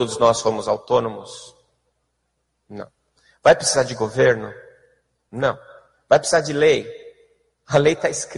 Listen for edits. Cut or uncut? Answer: uncut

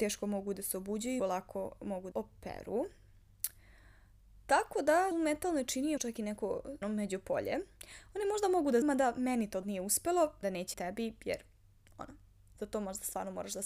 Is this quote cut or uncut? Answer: cut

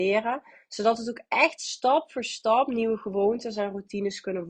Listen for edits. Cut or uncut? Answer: uncut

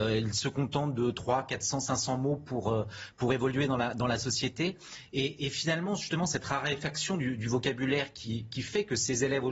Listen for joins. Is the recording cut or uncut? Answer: uncut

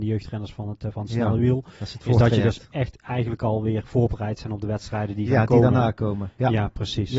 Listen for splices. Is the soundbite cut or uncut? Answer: uncut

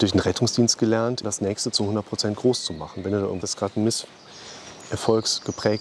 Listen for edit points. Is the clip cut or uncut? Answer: cut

